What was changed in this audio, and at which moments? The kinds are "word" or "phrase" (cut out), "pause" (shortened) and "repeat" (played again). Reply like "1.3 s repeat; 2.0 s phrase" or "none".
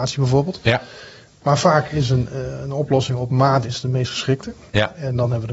none